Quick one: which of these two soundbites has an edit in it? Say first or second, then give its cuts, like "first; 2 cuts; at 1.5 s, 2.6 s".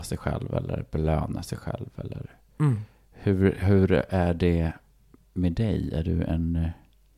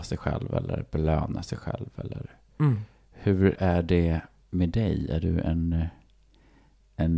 second; 2 cuts; at 3.5 s, 4.4 s